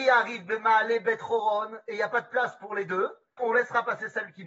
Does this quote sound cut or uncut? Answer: cut